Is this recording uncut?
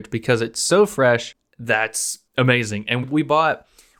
no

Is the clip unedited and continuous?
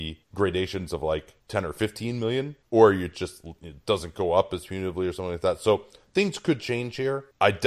yes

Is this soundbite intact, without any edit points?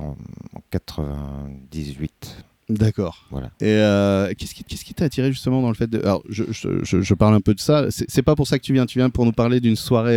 no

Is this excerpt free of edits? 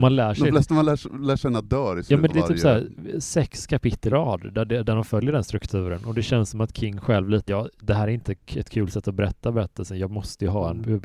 no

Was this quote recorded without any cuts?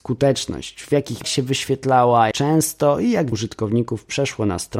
no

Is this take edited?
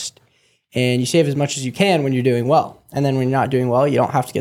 no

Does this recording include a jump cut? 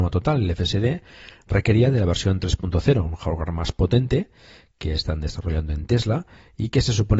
no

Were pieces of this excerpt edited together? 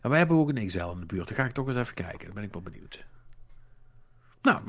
no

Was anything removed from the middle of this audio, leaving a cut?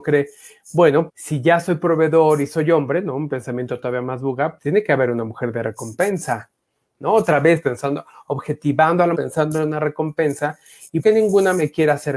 yes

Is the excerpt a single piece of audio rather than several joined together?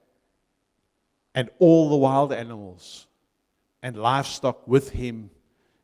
yes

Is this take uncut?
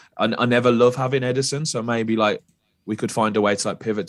yes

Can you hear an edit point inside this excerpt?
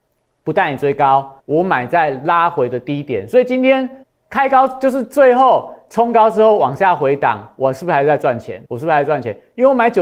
yes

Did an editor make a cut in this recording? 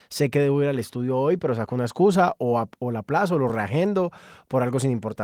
no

